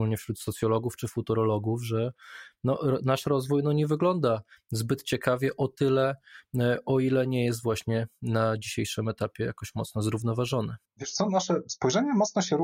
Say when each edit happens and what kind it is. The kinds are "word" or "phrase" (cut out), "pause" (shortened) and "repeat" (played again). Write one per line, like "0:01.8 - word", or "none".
0:10.9 - pause